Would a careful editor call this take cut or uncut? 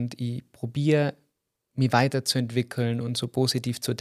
uncut